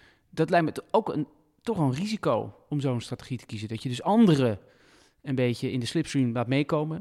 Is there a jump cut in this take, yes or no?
no